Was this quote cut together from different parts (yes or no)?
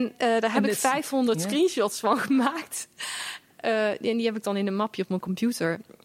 no